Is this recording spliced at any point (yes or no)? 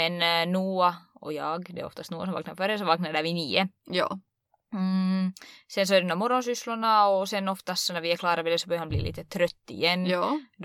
no